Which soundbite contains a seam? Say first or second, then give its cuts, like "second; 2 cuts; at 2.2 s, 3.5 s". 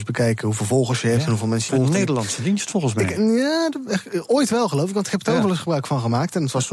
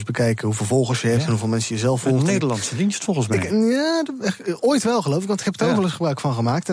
first; 1 cut; at 1.7 s